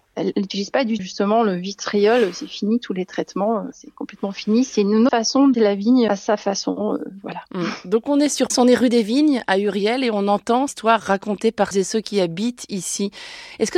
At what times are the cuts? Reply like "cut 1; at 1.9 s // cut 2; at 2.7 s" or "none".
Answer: cut 1; at 1.0 s // cut 2; at 3.7 s // cut 3; at 5.1 s // cut 4; at 5.5 s // cut 5; at 6.1 s // cut 6; at 8.5 s // cut 7; at 10.7 s // cut 8; at 11.7 s